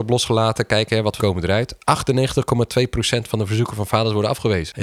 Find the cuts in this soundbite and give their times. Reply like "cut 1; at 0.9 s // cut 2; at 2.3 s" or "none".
cut 1; at 1.2 s